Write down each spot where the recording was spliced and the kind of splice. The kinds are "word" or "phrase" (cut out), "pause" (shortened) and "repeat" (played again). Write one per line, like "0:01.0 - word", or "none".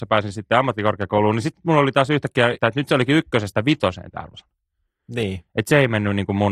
0:02.6 - word